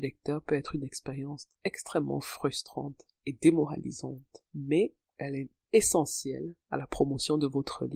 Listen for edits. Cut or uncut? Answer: cut